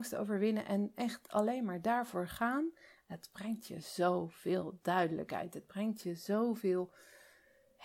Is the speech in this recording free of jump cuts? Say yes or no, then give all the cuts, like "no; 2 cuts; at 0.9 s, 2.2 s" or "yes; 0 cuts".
yes; 0 cuts